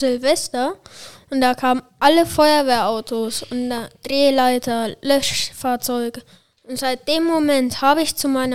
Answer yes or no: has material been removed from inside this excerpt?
no